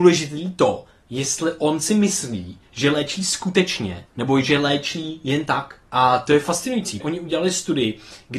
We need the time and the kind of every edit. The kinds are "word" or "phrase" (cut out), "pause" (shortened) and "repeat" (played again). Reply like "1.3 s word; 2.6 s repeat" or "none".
4.1 s pause; 5.8 s pause; 7.0 s word